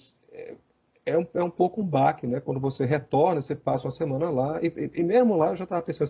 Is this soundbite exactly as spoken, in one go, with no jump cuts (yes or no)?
yes